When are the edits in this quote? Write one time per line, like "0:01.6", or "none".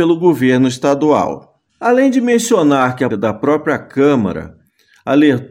0:01.7
0:03.1